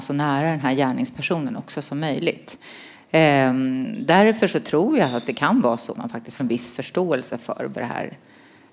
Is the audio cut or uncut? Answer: cut